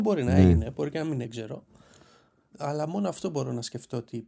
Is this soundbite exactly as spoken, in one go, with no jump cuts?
no; 1 cut; at 1.2 s

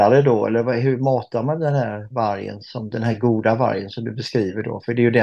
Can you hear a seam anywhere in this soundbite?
no; 0 cuts

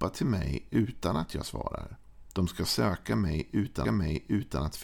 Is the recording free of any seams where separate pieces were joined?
no; 1 cut; at 3.8 s

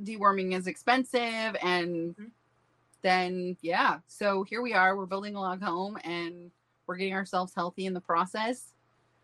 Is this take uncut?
yes; 0 cuts

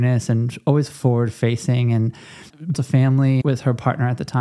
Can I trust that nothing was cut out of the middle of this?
no; 1 cut; at 2.7 s

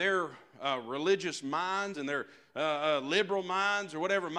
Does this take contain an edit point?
yes; 1 cut; at 1.9 s

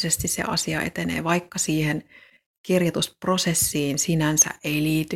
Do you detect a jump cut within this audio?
no; 0 cuts

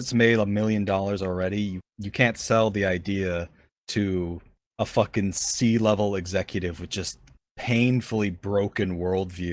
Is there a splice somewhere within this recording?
no; 0 cuts

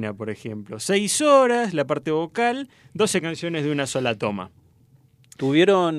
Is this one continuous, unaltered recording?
yes; 0 cuts

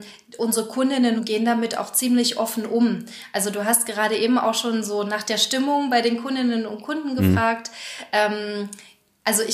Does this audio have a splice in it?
no; 0 cuts

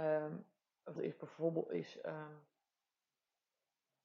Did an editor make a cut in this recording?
yes; 1 cut; at 1.0 s

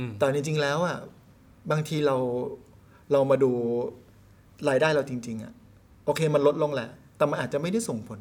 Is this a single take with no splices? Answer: yes; 0 cuts

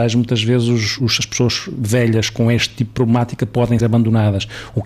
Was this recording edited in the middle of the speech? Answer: yes; 1 cut; at 3.8 s

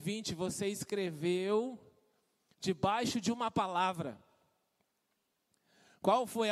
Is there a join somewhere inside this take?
no; 0 cuts

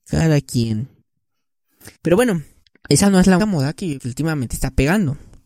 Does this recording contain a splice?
yes; 4 cuts; at 1.9 s, 2.7 s, 3.4 s, 4.0 s

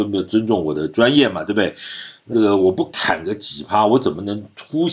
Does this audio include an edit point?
yes; 1 cut; at 2.3 s

